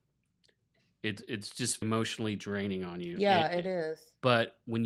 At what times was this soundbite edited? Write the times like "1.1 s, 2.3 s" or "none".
1.8 s